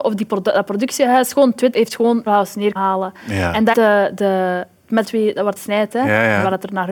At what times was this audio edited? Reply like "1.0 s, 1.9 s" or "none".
1.7 s, 2.3 s, 2.8 s, 3.7 s, 5.0 s, 5.6 s